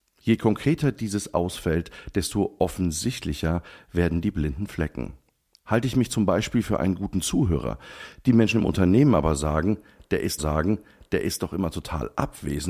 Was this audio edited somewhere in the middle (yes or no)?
yes